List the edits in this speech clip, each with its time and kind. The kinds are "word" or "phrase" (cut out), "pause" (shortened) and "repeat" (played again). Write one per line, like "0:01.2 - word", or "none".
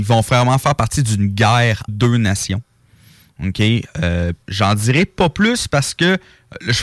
0:01.9 - word
0:04.4 - pause

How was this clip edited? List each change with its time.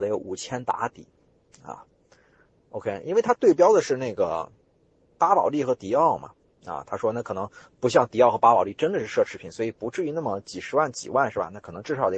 none

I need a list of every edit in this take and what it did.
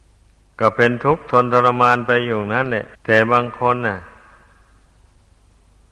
0:02.9 - pause

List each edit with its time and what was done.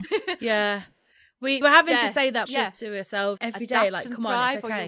0:01.6 - word
0:02.5 - word
0:03.4 - word

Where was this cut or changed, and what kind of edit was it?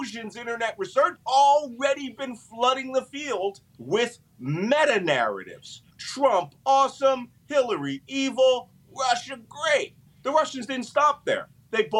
0:01.2 - phrase
0:03.7 - pause
0:05.9 - pause
0:10.1 - pause

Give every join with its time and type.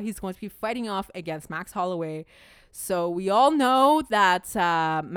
none

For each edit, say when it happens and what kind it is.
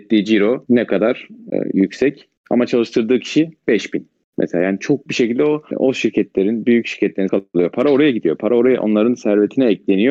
0:01.5 - word
0:05.1 - word
0:07.3 - phrase

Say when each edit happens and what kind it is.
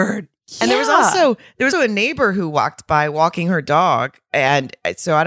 0:01.7 - word

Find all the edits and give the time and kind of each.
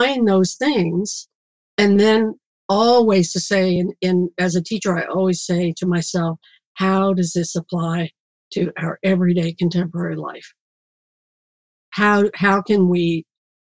none

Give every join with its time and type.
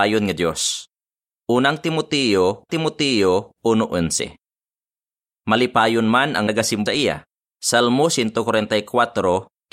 0:02.7 - repeat
0:06.5 - word
0:06.9 - word
0:07.4 - pause

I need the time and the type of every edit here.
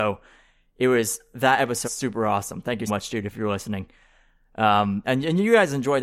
0:01.8 - word
0:02.9 - word
0:05.0 - word

